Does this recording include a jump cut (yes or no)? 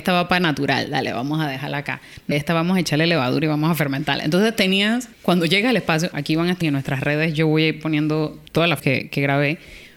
yes